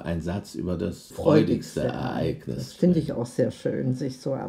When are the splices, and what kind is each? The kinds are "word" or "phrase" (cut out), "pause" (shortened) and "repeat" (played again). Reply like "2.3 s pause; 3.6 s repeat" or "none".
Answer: 1.1 s word